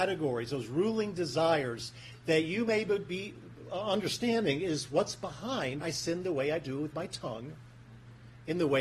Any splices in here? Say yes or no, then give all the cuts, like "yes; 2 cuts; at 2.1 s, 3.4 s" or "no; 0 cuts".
yes; 1 cut; at 5.8 s